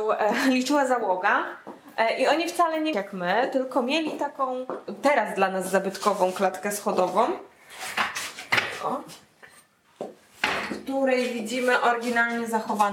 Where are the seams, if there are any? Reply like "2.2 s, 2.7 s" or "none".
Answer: 2.9 s